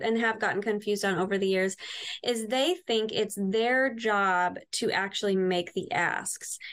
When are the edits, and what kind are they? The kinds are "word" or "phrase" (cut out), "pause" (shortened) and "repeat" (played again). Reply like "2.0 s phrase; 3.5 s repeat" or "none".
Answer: none

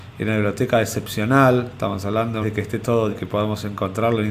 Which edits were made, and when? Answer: 2.4 s phrase; 3.1 s word

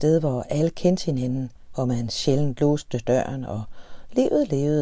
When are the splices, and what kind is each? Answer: none

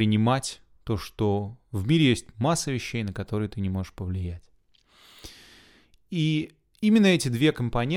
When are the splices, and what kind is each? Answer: none

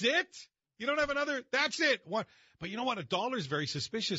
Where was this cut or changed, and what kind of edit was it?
none

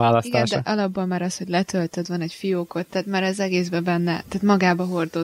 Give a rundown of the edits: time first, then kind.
none

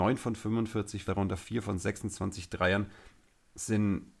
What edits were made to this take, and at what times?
1.1 s phrase

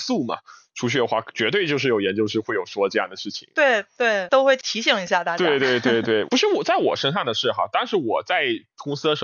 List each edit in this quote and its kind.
none

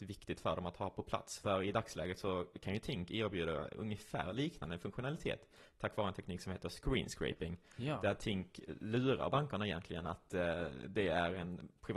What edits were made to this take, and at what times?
none

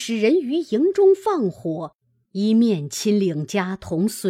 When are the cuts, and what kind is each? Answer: none

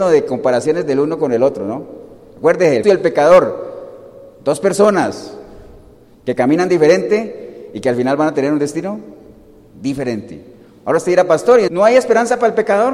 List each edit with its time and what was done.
2.8 s word; 11.7 s word

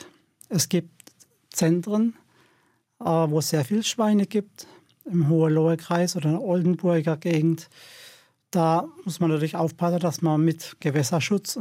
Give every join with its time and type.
none

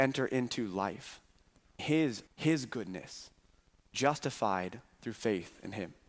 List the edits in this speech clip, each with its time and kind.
1.8 s word; 2.3 s word; 3.9 s word

